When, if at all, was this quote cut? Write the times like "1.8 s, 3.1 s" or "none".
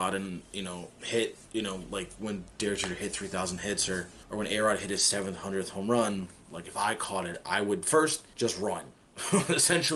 8.9 s